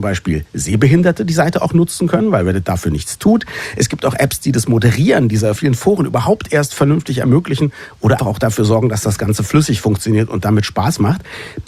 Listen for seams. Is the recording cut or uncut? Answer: cut